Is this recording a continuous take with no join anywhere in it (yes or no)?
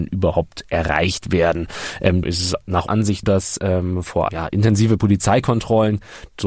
no